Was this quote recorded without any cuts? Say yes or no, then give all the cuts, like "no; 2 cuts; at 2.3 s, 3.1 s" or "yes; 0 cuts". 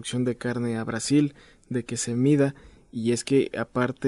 yes; 0 cuts